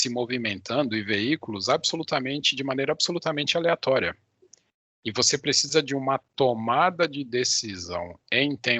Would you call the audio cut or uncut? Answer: uncut